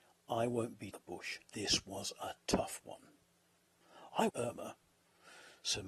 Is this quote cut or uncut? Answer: cut